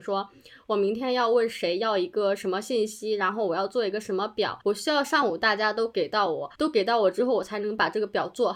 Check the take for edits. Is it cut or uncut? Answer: cut